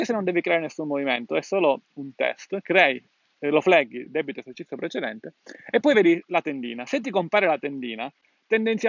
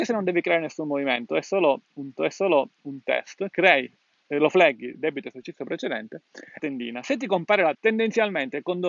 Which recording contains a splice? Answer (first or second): second